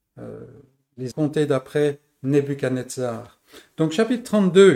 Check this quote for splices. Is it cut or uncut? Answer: cut